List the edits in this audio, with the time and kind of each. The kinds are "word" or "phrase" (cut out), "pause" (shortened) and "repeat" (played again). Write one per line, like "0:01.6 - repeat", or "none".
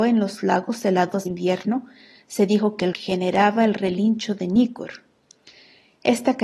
0:01.3 - word
0:02.9 - word